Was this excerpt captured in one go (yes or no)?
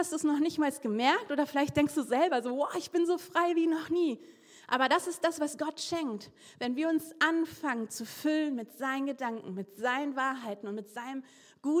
yes